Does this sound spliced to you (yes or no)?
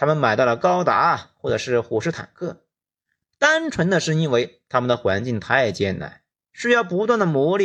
no